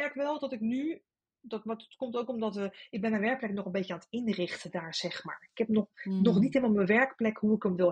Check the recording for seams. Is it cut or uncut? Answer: uncut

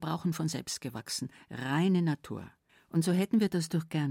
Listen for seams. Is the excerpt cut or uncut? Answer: cut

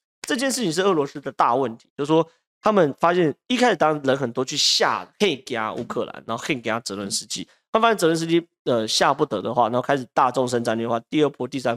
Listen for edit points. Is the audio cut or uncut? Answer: uncut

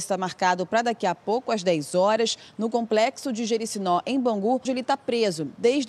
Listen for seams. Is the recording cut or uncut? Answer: cut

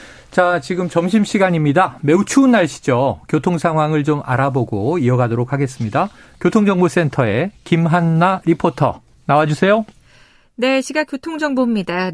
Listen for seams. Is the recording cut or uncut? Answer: uncut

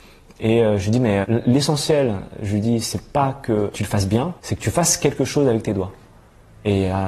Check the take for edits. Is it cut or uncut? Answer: cut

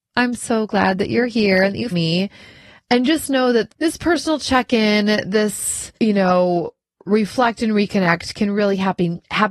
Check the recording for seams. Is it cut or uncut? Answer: cut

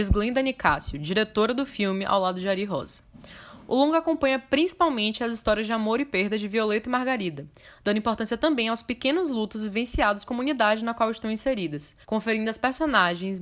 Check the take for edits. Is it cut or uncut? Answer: cut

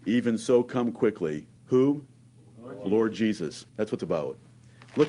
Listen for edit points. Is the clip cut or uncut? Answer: cut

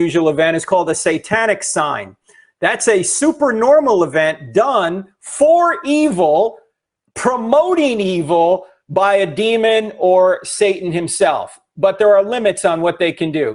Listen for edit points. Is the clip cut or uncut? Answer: uncut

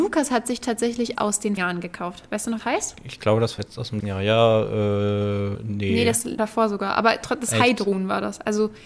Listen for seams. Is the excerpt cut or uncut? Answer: cut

